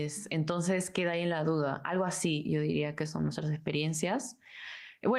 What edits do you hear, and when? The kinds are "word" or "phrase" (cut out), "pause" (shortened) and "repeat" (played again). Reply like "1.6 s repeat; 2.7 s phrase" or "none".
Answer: none